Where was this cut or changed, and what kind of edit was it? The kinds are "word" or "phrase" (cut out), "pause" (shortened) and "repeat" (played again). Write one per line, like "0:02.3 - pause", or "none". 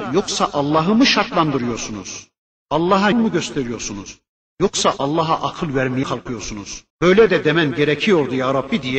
0:03.1 - word
0:06.0 - word
0:06.9 - pause